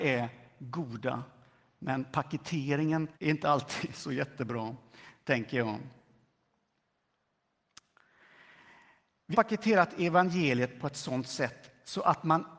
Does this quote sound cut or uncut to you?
cut